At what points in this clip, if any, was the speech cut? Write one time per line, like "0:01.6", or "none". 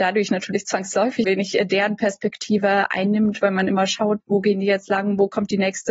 0:01.2
0:04.2